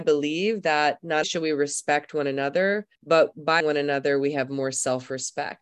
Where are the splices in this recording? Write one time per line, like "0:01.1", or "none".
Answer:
0:01.2
0:03.0
0:03.6